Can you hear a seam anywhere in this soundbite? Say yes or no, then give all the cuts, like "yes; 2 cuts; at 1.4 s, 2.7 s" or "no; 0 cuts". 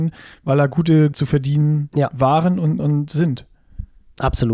yes; 2 cuts; at 1.1 s, 2.8 s